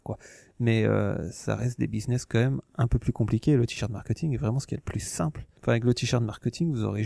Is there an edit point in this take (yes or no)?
no